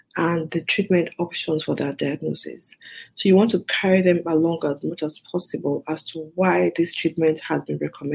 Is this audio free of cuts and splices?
yes; 0 cuts

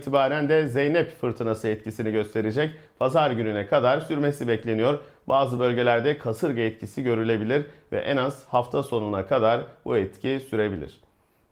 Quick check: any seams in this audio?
no; 0 cuts

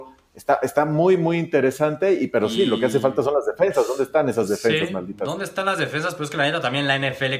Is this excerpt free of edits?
yes; 0 cuts

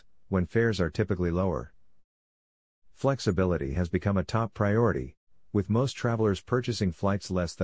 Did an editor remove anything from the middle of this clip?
no; 0 cuts

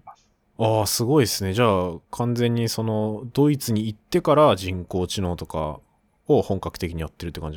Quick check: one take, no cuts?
yes; 0 cuts

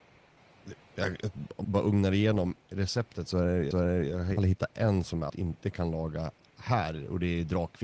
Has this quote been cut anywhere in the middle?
yes; 5 cuts; at 1.6 s, 2.6 s, 3.7 s, 4.4 s, 5.3 s

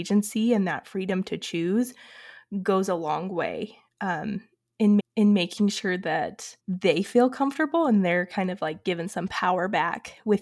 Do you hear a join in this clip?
yes; 2 cuts; at 5.0 s, 6.6 s

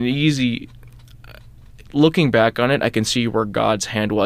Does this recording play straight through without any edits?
yes; 0 cuts

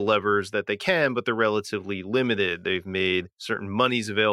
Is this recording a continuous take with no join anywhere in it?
yes; 0 cuts

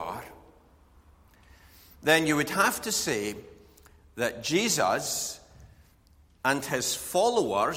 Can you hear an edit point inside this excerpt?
no; 0 cuts

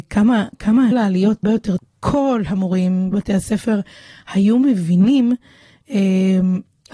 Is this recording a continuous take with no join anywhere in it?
no; 4 cuts; at 0.9 s, 1.4 s, 1.8 s, 3.1 s

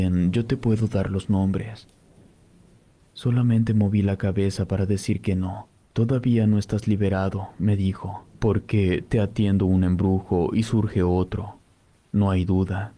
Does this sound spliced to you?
yes; 1 cut; at 8.3 s

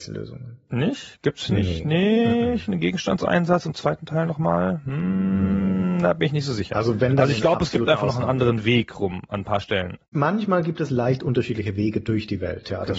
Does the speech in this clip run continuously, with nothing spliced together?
no; 1 cut; at 10.0 s

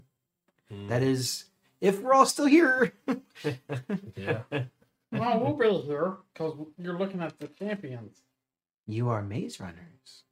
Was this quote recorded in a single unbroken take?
yes; 0 cuts

